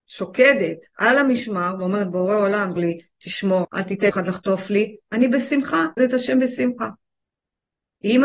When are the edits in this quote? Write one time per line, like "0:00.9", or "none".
0:02.8
0:03.6
0:04.1
0:06.0

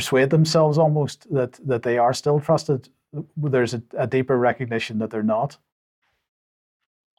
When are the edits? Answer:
none

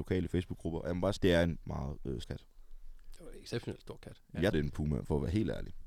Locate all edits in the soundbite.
0:01.2
0:01.6
0:02.2
0:04.5

